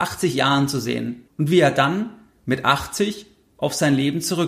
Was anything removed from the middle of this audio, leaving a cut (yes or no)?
yes